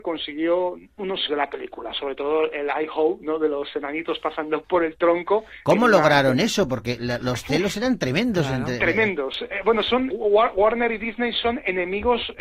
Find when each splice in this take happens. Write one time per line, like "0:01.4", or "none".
0:01.3
0:04.6
0:10.1